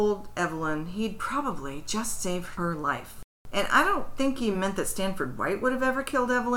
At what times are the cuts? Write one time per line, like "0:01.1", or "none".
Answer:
none

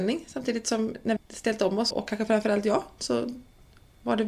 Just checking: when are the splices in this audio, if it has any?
0:01.2
0:01.9

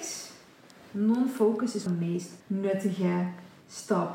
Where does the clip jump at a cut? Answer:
0:01.9
0:02.4

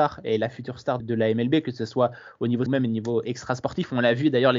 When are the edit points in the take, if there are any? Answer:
0:01.0
0:02.7

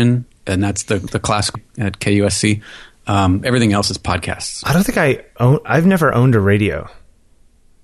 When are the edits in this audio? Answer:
0:01.5

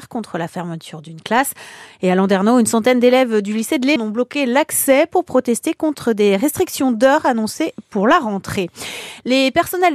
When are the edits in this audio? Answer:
0:04.0

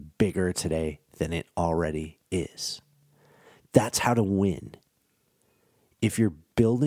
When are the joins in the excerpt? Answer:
none

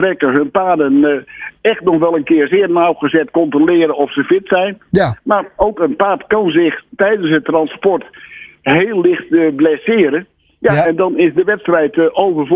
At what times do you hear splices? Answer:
none

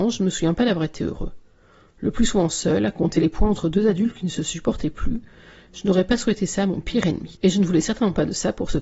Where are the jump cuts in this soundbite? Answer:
none

